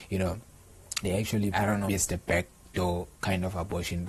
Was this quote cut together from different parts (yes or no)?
yes